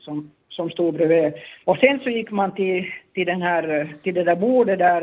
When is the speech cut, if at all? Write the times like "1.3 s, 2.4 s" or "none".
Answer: 1.6 s